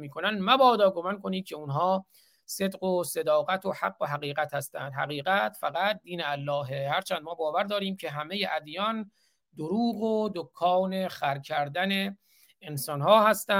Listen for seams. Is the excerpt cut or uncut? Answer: uncut